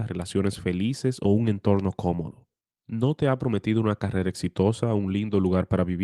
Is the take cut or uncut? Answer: uncut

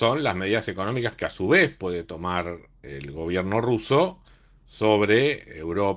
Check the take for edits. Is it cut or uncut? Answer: uncut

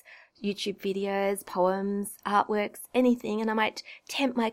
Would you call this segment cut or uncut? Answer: uncut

